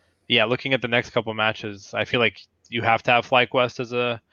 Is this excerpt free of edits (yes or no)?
yes